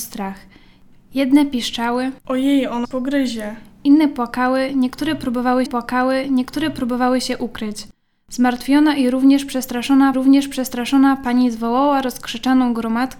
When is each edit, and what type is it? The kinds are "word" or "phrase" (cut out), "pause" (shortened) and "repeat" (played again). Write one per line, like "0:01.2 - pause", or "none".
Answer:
0:02.2 - pause
0:02.8 - word
0:05.7 - repeat
0:10.1 - repeat